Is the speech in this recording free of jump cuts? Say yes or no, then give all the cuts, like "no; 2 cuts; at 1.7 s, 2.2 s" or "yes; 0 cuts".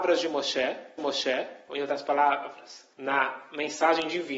no; 2 cuts; at 1.0 s, 2.9 s